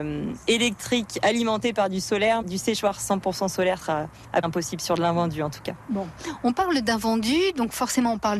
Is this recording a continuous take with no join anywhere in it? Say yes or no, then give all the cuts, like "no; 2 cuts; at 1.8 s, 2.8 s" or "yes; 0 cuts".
no; 3 cuts; at 2.4 s, 3.8 s, 4.4 s